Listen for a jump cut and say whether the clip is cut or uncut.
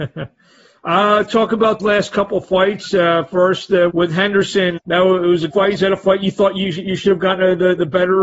cut